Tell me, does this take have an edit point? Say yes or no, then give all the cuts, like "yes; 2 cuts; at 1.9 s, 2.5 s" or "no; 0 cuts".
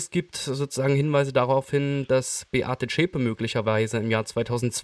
no; 0 cuts